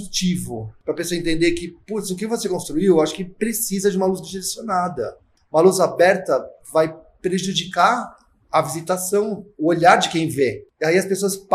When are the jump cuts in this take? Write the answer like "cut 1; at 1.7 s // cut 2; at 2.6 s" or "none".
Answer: none